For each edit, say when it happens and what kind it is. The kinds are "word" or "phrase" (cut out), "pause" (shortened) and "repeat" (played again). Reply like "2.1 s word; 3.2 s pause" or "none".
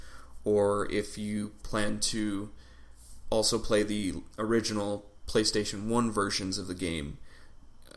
none